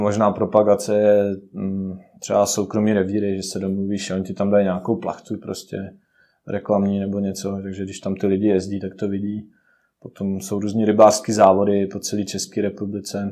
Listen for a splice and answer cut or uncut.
uncut